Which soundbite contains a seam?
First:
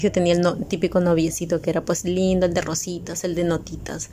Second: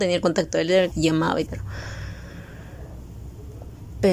second; 2 cuts; at 0.9 s, 1.5 s

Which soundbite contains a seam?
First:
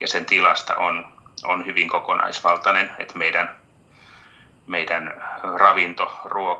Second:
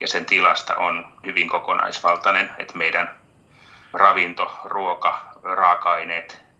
second; 2 cuts; at 1.2 s, 3.9 s

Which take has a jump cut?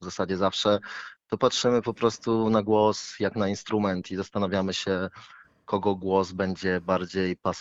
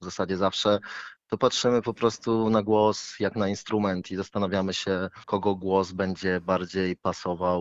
second; 1 cut; at 5.2 s

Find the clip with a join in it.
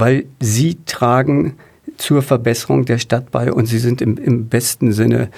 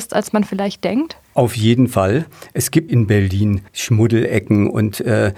second; 3 cuts; at 1.2 s, 2.9 s, 3.7 s

